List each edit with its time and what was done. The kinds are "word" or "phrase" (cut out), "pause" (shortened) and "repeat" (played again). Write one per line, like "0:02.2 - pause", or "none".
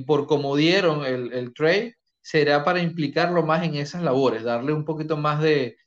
0:02.1 - pause